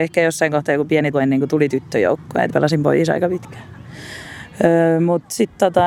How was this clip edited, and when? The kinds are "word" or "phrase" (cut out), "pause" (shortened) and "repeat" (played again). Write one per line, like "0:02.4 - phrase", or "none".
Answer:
0:01.1 - word
0:02.5 - word